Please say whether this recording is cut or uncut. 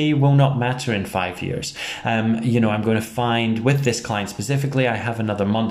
uncut